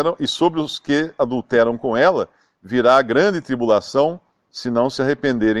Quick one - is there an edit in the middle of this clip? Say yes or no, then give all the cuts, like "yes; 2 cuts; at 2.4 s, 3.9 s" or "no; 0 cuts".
no; 0 cuts